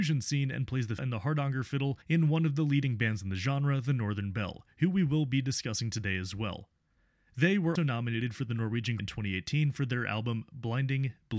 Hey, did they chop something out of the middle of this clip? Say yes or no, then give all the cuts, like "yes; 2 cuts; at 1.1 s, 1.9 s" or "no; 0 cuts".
yes; 4 cuts; at 1.0 s, 2.0 s, 7.8 s, 9.0 s